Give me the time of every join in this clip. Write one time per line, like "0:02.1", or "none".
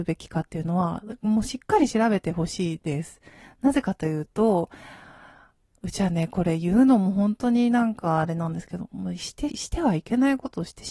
0:09.5

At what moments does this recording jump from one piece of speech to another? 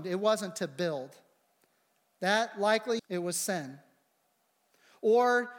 0:03.0

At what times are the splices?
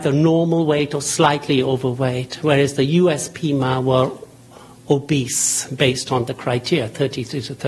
none

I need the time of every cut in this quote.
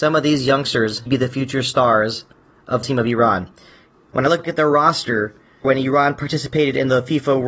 0:01.1
0:02.8
0:04.4
0:05.6

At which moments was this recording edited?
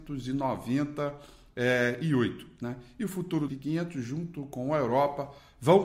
0:03.5

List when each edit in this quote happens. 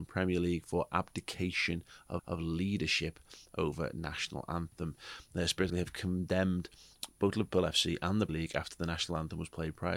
0:02.2
0:05.7
0:08.3

